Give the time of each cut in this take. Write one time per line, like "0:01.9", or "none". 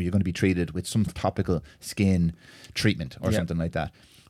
0:01.1